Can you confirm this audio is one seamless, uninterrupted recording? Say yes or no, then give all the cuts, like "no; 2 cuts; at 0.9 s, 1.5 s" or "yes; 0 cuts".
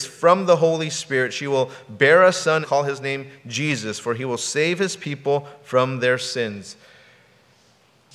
no; 1 cut; at 2.6 s